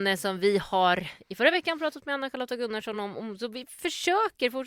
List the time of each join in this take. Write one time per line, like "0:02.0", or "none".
none